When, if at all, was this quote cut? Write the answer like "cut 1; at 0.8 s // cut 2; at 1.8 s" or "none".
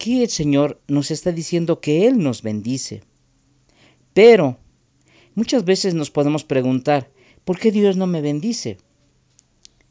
none